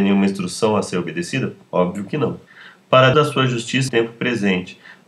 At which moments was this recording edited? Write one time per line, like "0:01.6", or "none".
0:03.1
0:03.9